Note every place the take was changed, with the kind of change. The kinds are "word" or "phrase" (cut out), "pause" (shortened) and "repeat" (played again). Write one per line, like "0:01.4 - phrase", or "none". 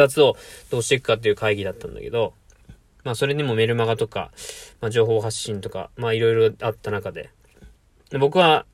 none